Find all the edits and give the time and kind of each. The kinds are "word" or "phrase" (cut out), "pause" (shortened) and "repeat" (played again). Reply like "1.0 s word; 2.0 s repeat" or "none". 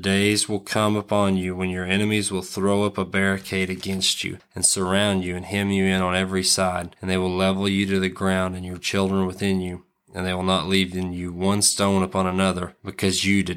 none